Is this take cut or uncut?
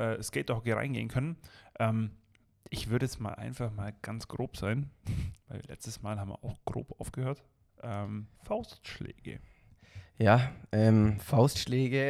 cut